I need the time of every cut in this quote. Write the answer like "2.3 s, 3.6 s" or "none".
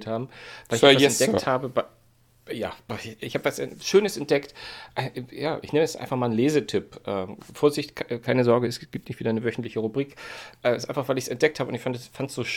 none